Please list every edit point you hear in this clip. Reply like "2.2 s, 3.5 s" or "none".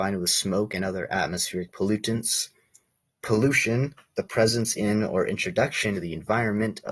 5.9 s

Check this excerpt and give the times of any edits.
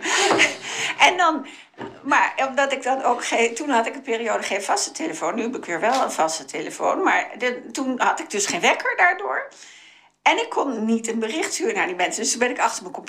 none

